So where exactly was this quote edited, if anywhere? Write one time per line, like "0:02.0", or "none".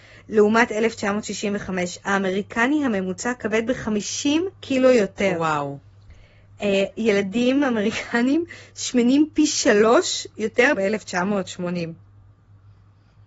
0:04.5
0:06.9
0:10.7